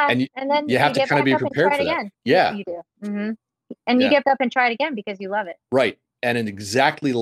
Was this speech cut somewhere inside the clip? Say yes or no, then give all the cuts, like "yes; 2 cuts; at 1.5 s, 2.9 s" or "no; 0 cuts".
yes; 3 cuts; at 2.1 s, 4.2 s, 5.6 s